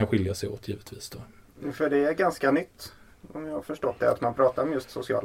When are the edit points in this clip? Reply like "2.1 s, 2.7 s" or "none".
none